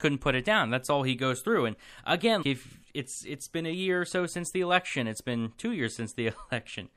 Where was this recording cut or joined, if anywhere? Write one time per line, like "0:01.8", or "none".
0:02.4